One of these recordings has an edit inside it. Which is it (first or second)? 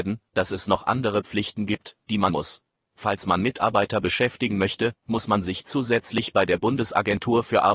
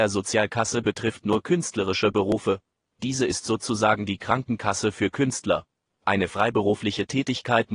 first